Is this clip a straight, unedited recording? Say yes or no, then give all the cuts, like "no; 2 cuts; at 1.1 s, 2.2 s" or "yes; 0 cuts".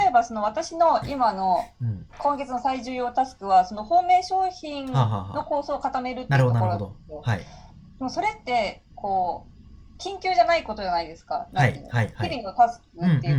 no; 2 cuts; at 2.1 s, 8.9 s